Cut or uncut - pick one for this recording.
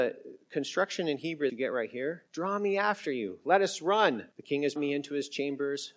cut